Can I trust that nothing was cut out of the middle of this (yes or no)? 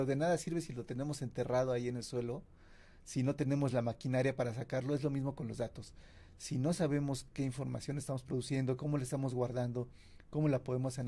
yes